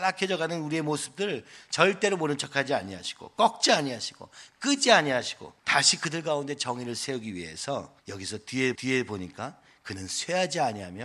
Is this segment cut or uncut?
cut